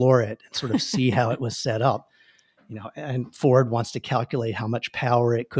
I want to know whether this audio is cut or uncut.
uncut